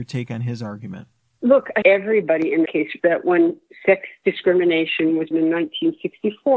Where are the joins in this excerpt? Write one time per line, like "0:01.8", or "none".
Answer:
0:01.8
0:02.7
0:03.0
0:05.3

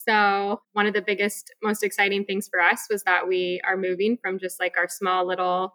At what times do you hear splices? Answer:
none

